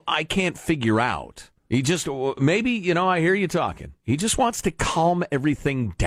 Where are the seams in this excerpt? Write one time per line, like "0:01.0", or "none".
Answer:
0:01.6